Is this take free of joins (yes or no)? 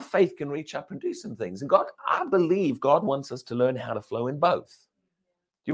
yes